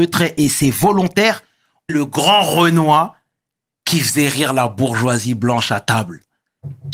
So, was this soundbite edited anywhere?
yes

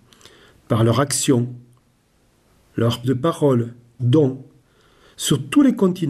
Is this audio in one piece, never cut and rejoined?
no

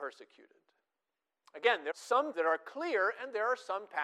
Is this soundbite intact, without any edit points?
no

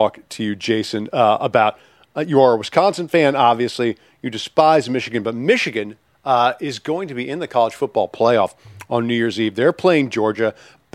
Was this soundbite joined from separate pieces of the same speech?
no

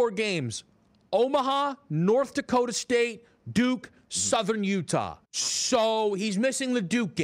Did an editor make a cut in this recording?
yes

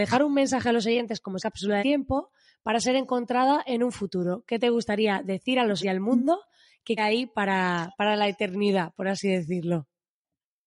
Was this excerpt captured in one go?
no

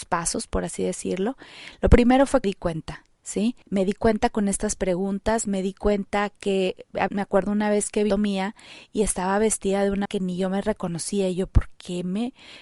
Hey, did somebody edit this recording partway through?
yes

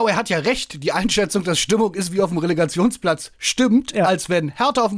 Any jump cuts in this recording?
no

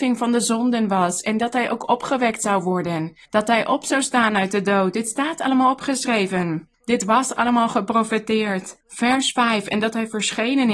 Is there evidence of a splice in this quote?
yes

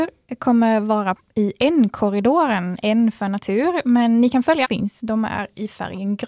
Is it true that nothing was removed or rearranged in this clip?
no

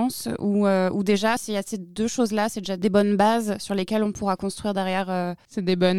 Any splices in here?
no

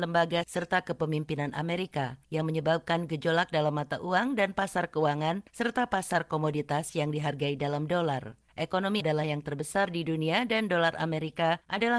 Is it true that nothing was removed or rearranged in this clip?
no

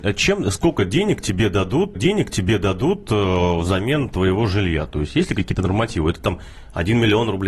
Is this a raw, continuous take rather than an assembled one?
no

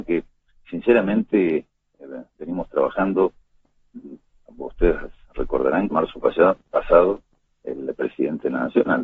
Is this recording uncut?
no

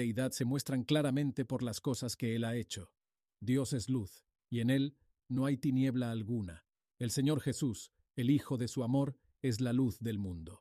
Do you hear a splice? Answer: no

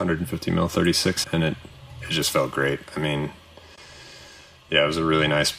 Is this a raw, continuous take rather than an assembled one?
no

